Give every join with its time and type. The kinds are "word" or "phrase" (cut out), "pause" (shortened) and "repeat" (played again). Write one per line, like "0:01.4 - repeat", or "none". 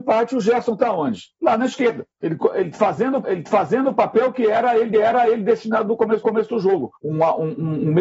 0:01.3 - pause
0:02.1 - pause
0:03.2 - repeat
0:04.9 - repeat
0:06.2 - repeat
0:07.0 - pause